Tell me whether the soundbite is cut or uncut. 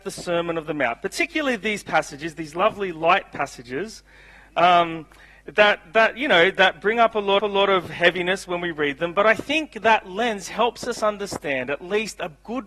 cut